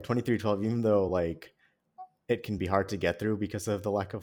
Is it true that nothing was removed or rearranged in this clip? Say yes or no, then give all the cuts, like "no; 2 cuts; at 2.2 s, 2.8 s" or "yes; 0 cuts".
yes; 0 cuts